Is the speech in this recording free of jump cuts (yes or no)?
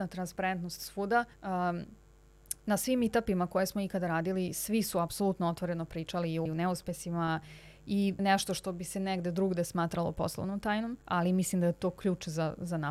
no